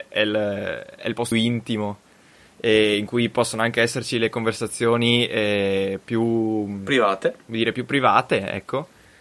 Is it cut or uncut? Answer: cut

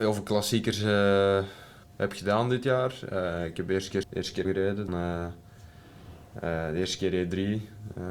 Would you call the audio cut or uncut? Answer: cut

